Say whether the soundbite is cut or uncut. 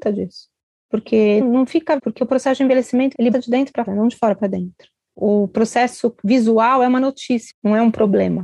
cut